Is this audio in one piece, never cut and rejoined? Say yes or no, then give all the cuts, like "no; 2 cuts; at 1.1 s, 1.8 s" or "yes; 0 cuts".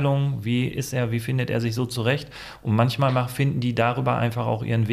yes; 0 cuts